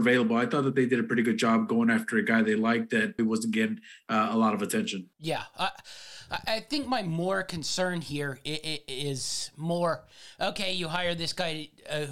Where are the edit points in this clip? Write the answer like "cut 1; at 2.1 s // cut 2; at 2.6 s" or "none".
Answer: cut 1; at 3.2 s // cut 2; at 5.1 s